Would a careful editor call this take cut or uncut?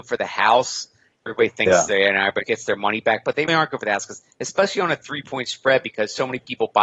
cut